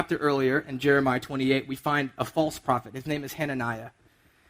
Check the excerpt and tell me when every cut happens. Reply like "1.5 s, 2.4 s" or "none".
none